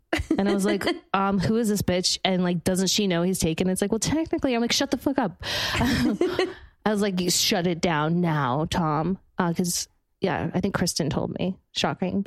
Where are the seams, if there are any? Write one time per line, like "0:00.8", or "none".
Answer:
none